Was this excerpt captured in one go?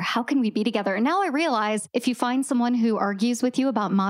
yes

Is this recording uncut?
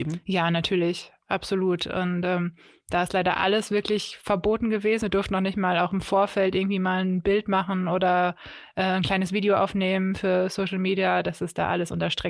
yes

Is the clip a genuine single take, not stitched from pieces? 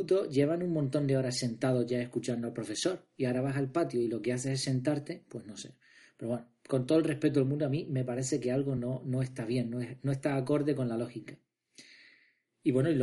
yes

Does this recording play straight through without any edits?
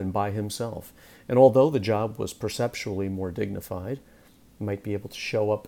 yes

